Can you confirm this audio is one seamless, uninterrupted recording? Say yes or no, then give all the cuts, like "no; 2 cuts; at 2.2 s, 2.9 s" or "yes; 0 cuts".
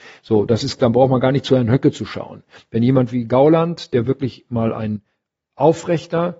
yes; 0 cuts